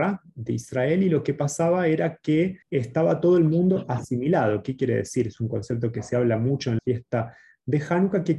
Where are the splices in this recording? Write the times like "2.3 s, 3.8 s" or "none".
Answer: 2.6 s, 6.8 s